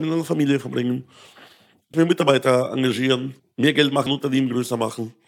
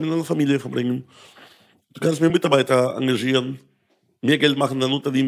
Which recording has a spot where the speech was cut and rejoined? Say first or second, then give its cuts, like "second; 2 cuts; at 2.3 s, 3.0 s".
first; 3 cuts; at 1.9 s, 3.4 s, 4.1 s